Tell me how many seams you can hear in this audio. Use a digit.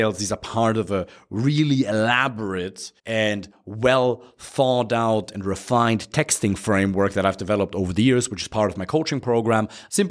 1